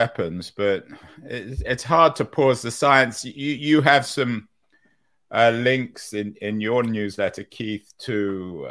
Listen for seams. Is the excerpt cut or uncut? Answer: uncut